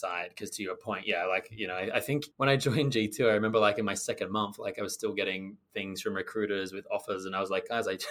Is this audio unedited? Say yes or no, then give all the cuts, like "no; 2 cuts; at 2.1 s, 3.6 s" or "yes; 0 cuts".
no; 1 cut; at 2.3 s